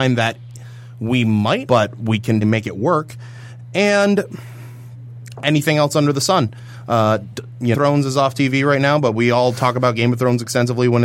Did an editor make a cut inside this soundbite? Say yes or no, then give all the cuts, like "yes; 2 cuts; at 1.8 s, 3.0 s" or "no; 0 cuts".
yes; 4 cuts; at 1.7 s, 2.4 s, 5.3 s, 7.7 s